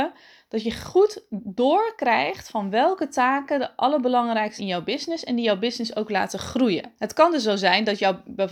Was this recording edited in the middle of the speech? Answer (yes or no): yes